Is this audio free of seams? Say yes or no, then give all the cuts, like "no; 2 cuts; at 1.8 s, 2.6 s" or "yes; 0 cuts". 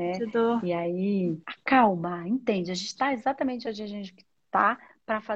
no; 1 cut; at 1.4 s